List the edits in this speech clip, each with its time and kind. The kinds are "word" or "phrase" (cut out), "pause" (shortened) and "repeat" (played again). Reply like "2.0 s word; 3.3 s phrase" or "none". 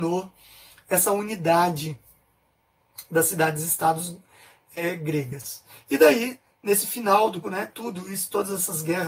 7.4 s phrase